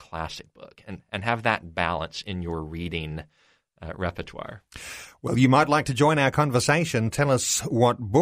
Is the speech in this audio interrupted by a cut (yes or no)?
no